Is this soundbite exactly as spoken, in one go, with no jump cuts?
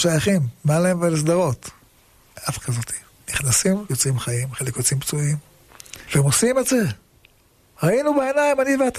no; 3 cuts; at 2.6 s, 3.9 s, 6.0 s

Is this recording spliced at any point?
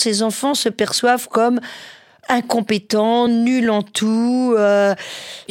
no; 0 cuts

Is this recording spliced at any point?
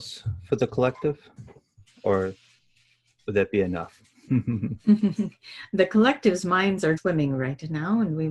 yes; 1 cut; at 7.0 s

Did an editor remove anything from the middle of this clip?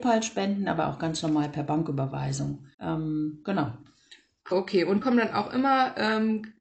yes; 3 cuts; at 2.7 s, 4.5 s, 5.0 s

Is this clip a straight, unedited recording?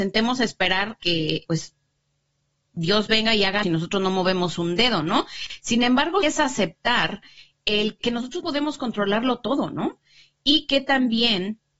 no; 6 cuts; at 1.0 s, 1.5 s, 3.6 s, 6.2 s, 8.0 s, 8.4 s

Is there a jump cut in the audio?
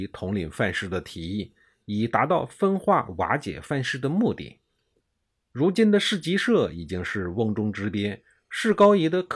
no; 0 cuts

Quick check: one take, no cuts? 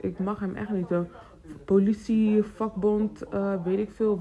yes; 0 cuts

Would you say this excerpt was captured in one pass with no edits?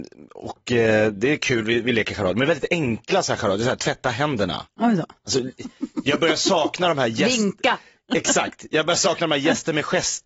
yes; 0 cuts

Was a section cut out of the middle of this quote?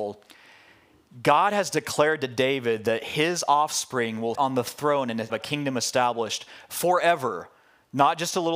yes; 2 cuts; at 4.3 s, 5.3 s

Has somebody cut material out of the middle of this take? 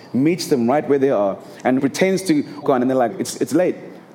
yes; 3 cuts; at 1.8 s, 2.6 s, 3.1 s

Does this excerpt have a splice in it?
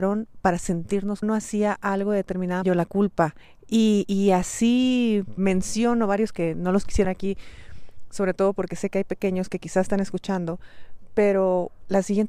yes; 5 cuts; at 1.2 s, 2.6 s, 5.4 s, 6.3 s, 7.0 s

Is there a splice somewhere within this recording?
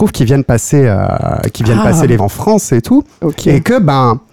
yes; 1 cut; at 2.2 s

